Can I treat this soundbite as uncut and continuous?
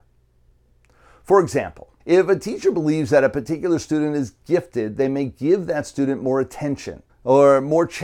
no; 2 cuts; at 2.0 s, 7.1 s

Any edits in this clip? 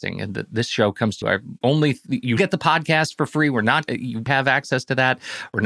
yes; 5 cuts; at 1.2 s, 1.6 s, 2.4 s, 3.9 s, 4.3 s

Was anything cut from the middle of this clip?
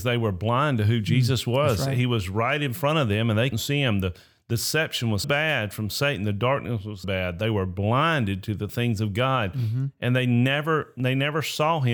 yes; 3 cuts; at 3.5 s, 5.2 s, 7.0 s

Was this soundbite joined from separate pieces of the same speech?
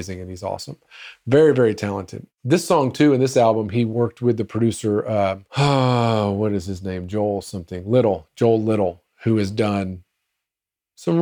yes; 2 cuts; at 2.3 s, 5.5 s

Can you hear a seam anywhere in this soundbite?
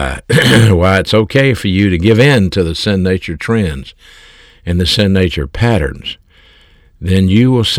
no; 0 cuts

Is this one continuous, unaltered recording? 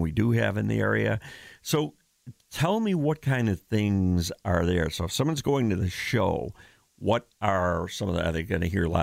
yes; 0 cuts

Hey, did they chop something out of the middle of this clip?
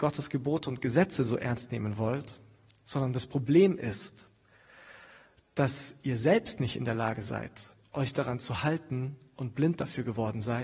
no; 0 cuts

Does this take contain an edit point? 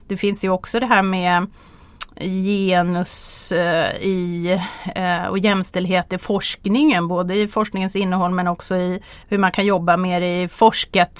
yes; 1 cut; at 9.2 s

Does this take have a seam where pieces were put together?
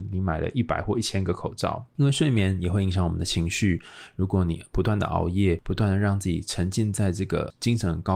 yes; 1 cut; at 1.9 s

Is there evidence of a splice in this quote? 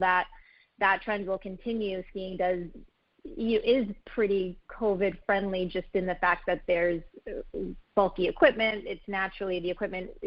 no; 0 cuts

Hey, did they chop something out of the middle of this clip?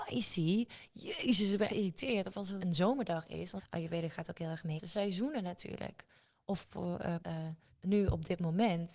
yes; 7 cuts; at 1.7 s, 2.6 s, 3.6 s, 4.8 s, 6.6 s, 7.2 s, 7.7 s

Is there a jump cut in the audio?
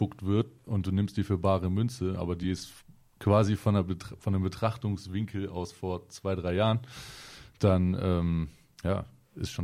no; 0 cuts

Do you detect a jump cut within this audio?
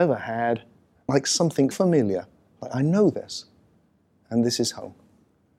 yes; 2 cuts; at 1.1 s, 1.7 s

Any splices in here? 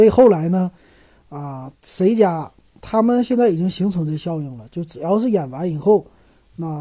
no; 0 cuts

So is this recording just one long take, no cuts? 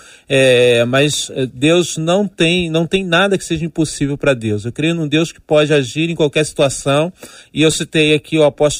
yes; 0 cuts

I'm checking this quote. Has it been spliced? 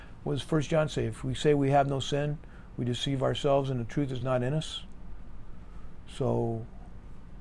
no; 0 cuts

